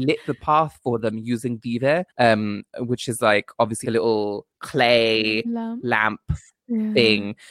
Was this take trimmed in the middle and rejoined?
yes; 3 cuts; at 2.1 s, 3.8 s, 4.5 s

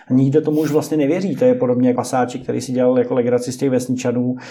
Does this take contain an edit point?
yes; 1 cut; at 2.0 s

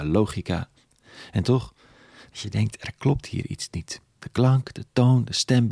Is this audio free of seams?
yes; 0 cuts

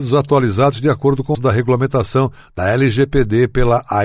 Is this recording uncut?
no; 1 cut; at 1.3 s

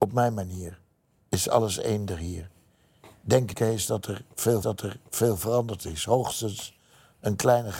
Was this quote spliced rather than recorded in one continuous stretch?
yes; 2 cuts; at 3.5 s, 4.6 s

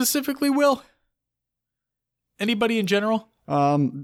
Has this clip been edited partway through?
no; 0 cuts

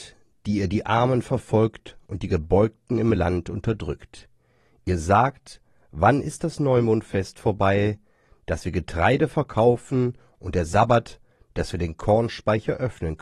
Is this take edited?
no; 0 cuts

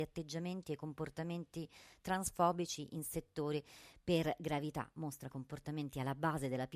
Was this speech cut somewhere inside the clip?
yes; 1 cut; at 5.3 s

